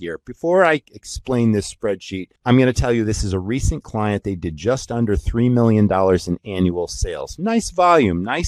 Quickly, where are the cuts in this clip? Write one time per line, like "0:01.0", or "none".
0:02.4